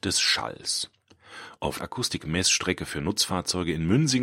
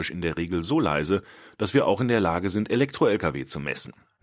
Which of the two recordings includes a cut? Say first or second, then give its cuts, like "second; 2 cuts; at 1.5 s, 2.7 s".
first; 1 cut; at 1.8 s